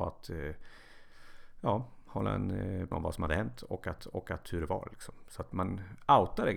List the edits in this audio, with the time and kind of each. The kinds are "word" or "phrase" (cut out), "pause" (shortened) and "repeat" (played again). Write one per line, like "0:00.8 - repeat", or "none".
0:02.9 - word
0:04.0 - repeat